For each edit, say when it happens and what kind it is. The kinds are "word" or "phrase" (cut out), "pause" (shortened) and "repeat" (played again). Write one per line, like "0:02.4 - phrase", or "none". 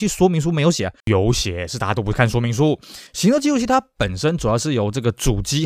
0:01.0 - pause
0:03.1 - pause